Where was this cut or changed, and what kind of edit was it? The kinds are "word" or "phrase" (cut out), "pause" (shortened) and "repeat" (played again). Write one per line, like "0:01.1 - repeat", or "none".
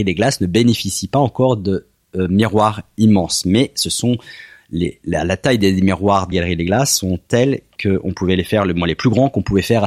0:06.3 - word